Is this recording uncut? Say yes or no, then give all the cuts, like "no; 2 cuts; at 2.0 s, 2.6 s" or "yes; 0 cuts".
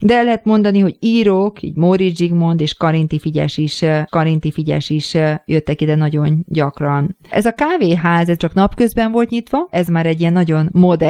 no; 3 cuts; at 4.1 s, 8.4 s, 9.7 s